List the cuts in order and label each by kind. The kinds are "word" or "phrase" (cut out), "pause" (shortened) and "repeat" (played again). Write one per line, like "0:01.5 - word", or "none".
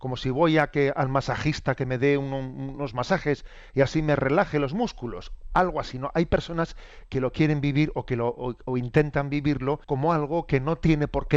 0:09.8 - pause